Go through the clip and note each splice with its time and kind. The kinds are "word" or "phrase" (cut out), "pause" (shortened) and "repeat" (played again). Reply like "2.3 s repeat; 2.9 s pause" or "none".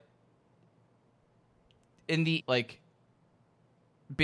2.4 s word